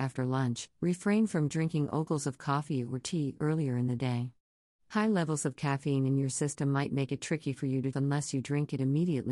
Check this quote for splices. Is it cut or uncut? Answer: cut